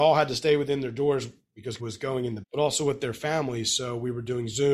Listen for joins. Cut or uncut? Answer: cut